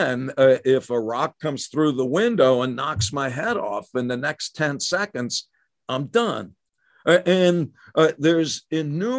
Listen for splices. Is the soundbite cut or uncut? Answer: uncut